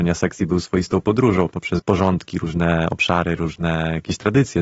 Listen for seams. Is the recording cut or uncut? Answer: cut